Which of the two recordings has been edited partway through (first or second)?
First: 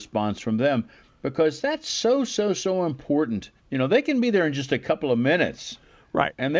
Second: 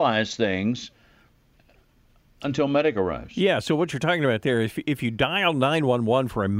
first